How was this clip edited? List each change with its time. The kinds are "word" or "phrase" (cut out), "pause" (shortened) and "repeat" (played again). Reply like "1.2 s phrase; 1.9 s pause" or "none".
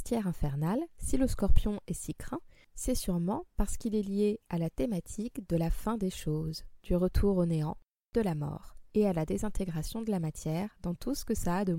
none